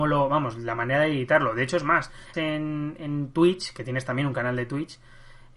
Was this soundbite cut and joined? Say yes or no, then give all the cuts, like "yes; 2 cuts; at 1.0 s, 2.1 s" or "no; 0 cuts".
yes; 1 cut; at 2.3 s